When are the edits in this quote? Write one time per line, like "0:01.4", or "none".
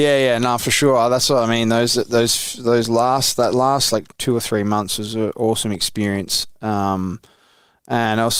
none